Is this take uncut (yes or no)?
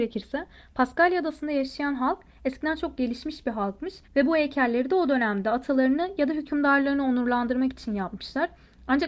no